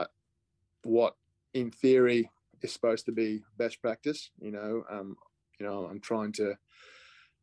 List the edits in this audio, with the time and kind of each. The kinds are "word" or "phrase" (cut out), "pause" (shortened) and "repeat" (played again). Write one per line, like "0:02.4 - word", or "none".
0:01.3 - pause